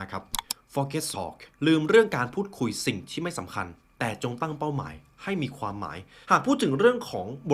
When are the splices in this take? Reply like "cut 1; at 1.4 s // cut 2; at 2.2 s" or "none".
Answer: cut 1; at 1.1 s // cut 2; at 1.5 s // cut 3; at 6.2 s